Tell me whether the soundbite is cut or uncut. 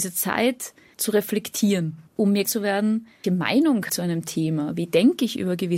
cut